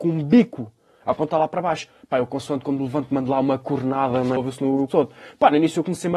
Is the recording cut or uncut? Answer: cut